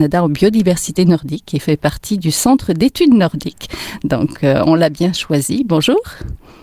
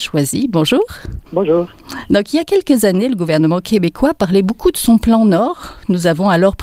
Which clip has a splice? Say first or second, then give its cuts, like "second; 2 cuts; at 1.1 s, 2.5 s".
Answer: second; 1 cut; at 1.3 s